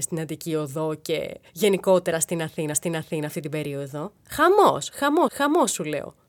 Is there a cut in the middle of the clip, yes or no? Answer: yes